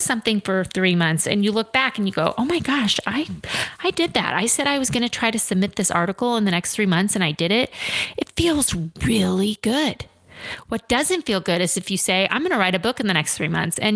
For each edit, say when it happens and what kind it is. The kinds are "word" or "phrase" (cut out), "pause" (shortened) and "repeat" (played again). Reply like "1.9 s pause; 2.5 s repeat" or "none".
none